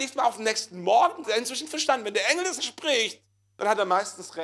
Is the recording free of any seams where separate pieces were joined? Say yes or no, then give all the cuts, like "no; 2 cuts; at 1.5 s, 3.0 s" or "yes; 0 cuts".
no; 3 cuts; at 1.2 s, 2.6 s, 3.3 s